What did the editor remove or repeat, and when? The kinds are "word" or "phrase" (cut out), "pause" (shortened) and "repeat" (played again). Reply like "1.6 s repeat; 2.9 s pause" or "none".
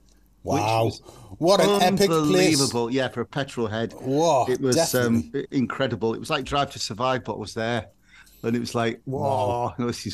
none